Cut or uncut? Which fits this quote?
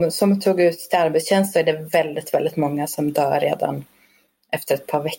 uncut